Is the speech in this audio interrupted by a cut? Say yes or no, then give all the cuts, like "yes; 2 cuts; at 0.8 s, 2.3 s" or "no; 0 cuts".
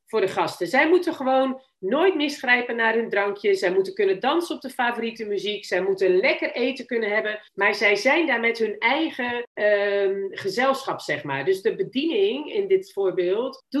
yes; 1 cut; at 7.5 s